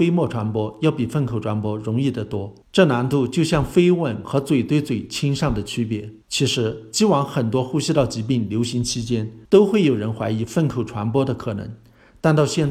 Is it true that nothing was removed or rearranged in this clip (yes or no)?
no